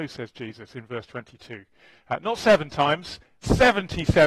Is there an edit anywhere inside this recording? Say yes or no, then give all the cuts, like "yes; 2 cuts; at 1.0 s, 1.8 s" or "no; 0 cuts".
no; 0 cuts